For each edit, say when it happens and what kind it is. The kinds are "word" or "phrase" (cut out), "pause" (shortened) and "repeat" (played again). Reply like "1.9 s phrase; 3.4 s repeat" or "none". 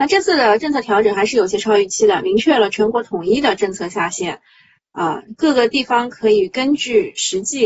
none